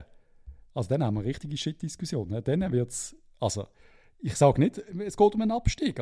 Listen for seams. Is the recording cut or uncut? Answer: uncut